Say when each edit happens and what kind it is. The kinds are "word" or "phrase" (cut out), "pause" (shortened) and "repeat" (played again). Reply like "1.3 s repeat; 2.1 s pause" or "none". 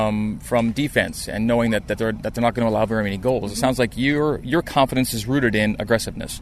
none